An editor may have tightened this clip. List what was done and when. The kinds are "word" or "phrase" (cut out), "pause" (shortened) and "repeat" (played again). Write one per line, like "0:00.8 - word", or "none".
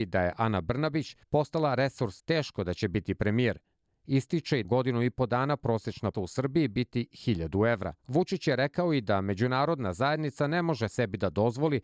0:01.2 - pause
0:02.2 - phrase
0:04.6 - phrase
0:06.1 - word
0:08.0 - pause

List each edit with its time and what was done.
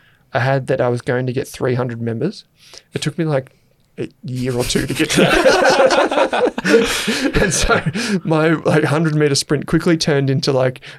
none

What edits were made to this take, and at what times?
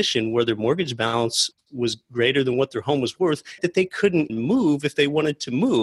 0:03.6 - word
0:04.3 - word

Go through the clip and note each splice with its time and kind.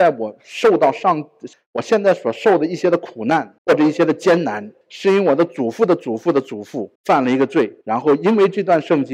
0:01.5 - pause
0:03.6 - pause
0:04.8 - pause
0:07.0 - pause
0:07.8 - pause

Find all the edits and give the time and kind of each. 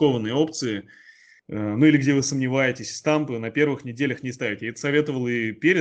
none

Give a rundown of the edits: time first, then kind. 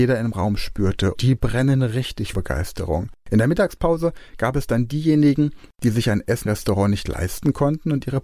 0:01.1 - word
0:02.3 - word
0:06.4 - word

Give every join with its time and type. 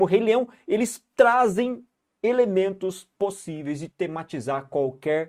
none

